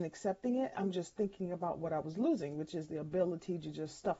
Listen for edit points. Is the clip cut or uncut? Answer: uncut